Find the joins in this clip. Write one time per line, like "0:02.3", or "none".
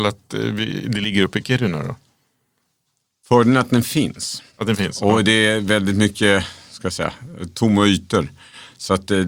0:04.5